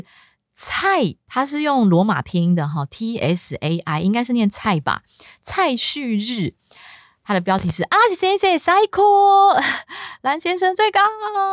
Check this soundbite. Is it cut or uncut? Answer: uncut